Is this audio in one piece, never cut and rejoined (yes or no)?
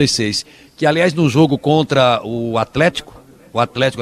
yes